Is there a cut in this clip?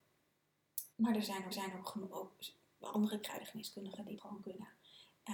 yes; 3 cuts; at 0.9 s, 1.5 s, 4.2 s

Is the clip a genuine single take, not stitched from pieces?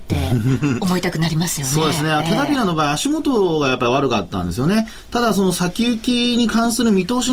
yes; 0 cuts

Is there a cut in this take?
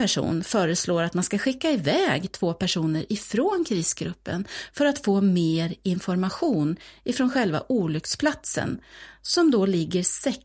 no; 0 cuts

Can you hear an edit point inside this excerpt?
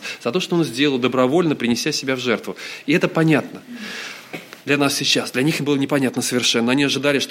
yes; 1 cut; at 4.6 s

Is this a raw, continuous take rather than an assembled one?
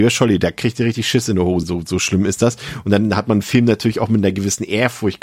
no; 1 cut; at 1.6 s

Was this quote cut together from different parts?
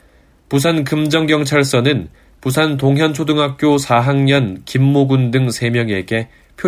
no; 0 cuts

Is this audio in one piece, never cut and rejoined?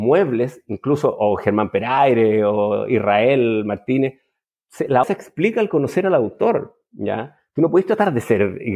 no; 1 cut; at 5.0 s

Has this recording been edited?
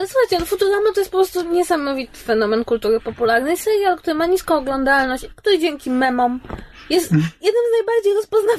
no; 0 cuts

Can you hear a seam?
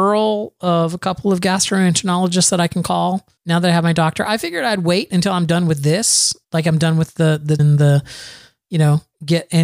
yes; 3 cuts; at 3.4 s, 6.4 s, 7.6 s

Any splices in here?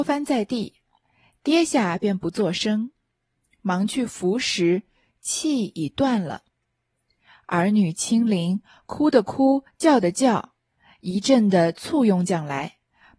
no; 0 cuts

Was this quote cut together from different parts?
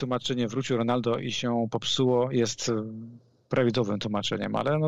no; 0 cuts

